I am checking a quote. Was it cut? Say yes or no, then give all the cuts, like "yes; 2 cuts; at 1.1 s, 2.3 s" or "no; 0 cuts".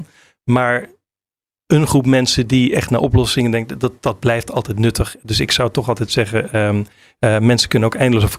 no; 0 cuts